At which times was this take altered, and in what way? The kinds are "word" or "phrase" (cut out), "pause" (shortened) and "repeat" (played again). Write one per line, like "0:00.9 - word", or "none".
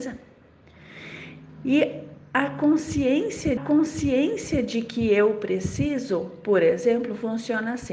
0:03.6 - repeat